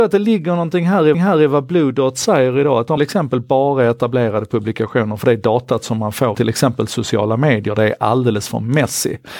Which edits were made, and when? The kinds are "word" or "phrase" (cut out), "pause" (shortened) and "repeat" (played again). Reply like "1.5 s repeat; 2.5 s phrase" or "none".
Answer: 1.1 s repeat; 3.0 s phrase; 6.3 s word